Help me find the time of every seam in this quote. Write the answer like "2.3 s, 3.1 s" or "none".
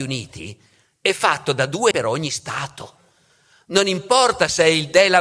1.9 s